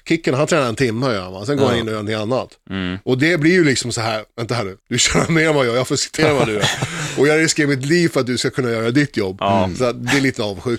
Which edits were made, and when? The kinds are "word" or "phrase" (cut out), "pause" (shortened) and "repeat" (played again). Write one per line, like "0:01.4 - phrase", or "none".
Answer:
0:04.8 - pause
0:06.2 - word